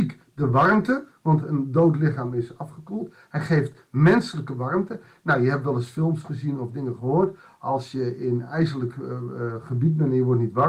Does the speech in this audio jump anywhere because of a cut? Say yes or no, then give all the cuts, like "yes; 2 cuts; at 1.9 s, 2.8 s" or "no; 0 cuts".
no; 0 cuts